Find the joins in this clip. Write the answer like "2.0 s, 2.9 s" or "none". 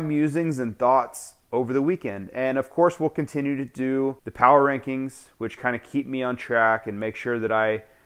4.2 s